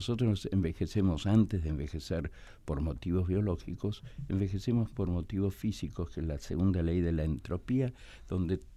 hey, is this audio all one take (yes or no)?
yes